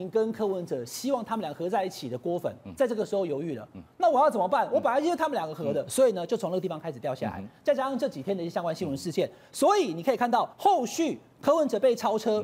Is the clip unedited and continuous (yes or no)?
no